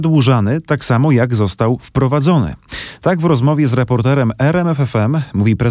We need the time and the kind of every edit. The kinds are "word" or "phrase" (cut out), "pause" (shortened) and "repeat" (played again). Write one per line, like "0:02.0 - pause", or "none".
none